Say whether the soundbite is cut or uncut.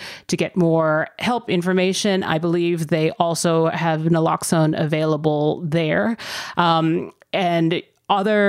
uncut